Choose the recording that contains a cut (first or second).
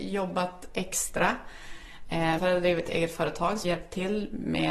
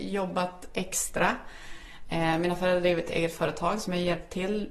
first